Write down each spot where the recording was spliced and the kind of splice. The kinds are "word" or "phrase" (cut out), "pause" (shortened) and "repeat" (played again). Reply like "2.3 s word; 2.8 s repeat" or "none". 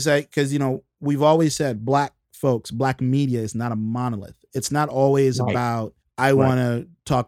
6.0 s pause